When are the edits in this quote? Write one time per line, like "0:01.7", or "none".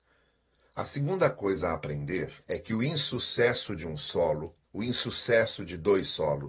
0:02.4
0:04.6